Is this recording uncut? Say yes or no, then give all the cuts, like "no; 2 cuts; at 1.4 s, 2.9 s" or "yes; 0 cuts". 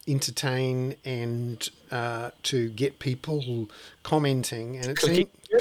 yes; 0 cuts